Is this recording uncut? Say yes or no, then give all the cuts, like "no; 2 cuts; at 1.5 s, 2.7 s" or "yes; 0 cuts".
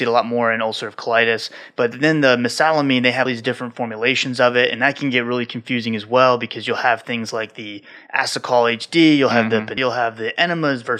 no; 2 cuts; at 3.3 s, 9.8 s